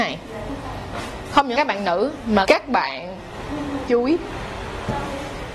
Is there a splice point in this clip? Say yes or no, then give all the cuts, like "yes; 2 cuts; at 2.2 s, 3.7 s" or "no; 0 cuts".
yes; 3 cuts; at 1.5 s, 2.4 s, 3.9 s